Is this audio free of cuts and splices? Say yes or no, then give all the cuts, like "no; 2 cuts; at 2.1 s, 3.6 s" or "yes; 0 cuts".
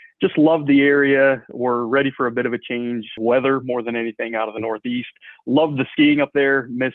yes; 0 cuts